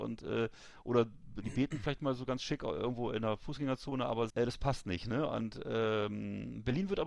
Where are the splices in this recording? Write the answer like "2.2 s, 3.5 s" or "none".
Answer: 4.3 s